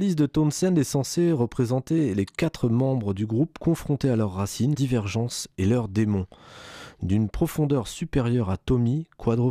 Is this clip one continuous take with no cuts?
no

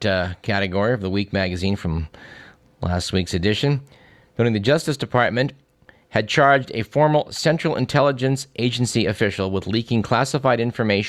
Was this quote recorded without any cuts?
yes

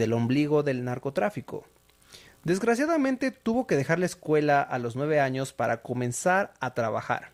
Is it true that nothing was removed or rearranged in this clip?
yes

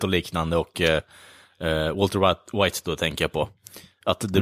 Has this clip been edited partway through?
no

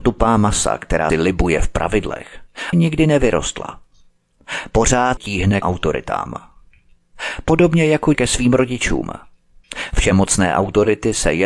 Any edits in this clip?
yes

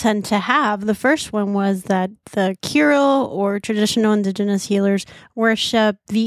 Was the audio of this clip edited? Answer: no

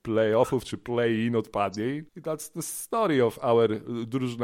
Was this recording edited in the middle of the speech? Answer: yes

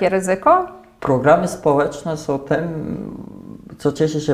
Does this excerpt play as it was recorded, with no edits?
yes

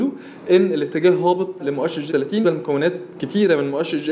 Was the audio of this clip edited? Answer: yes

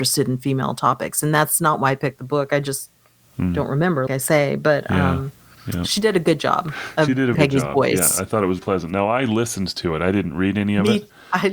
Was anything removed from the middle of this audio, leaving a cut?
yes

